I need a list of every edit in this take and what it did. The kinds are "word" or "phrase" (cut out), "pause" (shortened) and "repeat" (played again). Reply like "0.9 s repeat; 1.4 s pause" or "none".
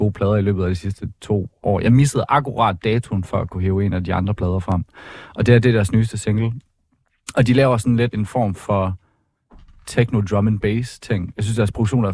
8.1 s word

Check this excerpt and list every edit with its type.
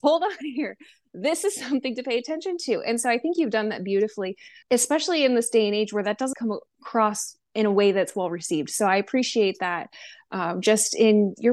4.6 s word; 6.3 s word

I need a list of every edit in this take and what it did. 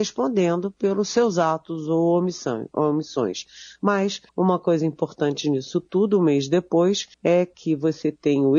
4.3 s pause; 7.1 s pause

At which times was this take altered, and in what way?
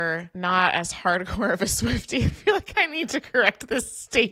2.3 s word

